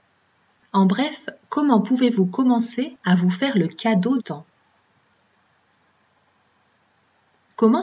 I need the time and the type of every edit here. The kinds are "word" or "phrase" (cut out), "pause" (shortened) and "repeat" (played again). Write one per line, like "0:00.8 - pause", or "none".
0:04.2 - word